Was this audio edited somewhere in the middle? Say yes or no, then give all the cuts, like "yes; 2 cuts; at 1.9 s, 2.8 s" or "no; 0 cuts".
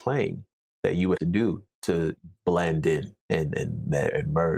yes; 2 cuts; at 1.2 s, 3.2 s